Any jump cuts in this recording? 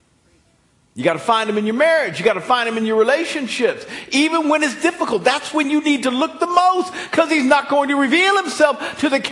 no; 0 cuts

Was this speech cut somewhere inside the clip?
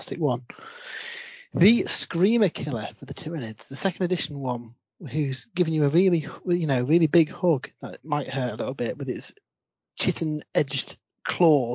no; 0 cuts

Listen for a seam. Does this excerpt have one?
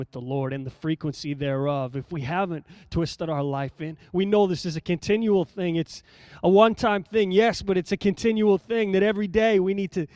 no; 0 cuts

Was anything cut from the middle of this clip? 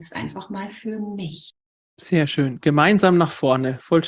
no; 0 cuts

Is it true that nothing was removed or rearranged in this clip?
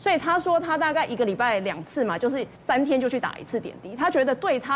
no; 1 cut; at 2.6 s

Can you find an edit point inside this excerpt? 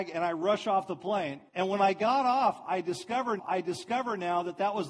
yes; 2 cuts; at 1.5 s, 3.4 s

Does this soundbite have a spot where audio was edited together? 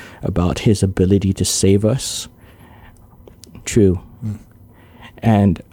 yes; 1 cut; at 3.6 s

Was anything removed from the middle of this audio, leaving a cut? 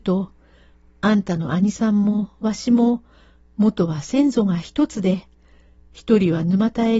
no; 0 cuts

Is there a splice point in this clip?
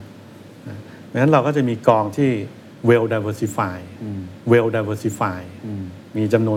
yes; 1 cut; at 4.4 s

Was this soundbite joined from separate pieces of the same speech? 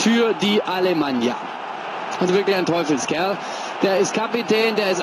yes; 1 cut; at 2.3 s

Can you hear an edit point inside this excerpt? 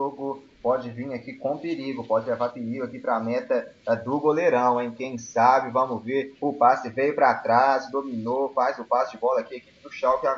no; 0 cuts

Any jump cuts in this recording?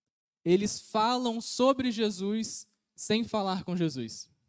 no; 0 cuts

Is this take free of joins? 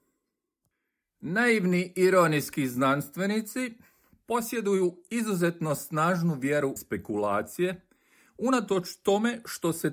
no; 1 cut; at 6.8 s

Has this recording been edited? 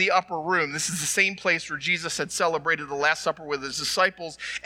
no; 0 cuts

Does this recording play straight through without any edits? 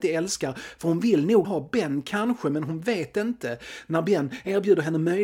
no; 1 cut; at 1.4 s

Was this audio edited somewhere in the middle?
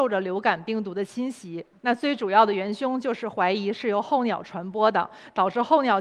yes; 1 cut; at 1.7 s

